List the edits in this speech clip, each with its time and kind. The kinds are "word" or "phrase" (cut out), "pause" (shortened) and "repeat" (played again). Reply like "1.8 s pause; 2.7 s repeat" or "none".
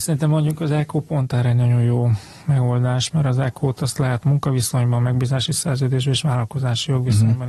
none